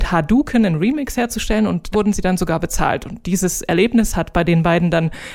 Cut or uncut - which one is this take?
cut